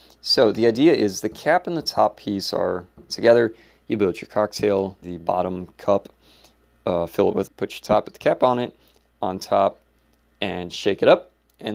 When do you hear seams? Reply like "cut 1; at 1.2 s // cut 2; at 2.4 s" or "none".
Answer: cut 1; at 3.1 s // cut 2; at 5.0 s // cut 3; at 7.4 s // cut 4; at 8.0 s